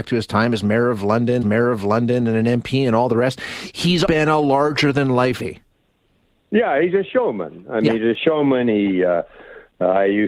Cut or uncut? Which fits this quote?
cut